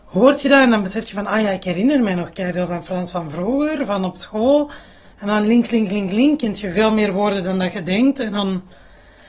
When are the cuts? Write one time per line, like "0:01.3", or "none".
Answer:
none